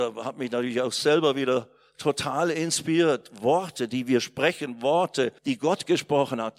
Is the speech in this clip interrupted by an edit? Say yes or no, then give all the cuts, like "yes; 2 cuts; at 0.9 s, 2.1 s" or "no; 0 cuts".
yes; 1 cut; at 5.4 s